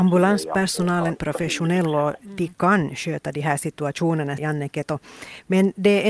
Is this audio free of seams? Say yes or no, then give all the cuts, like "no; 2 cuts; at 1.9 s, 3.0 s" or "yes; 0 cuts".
no; 2 cuts; at 1.2 s, 4.4 s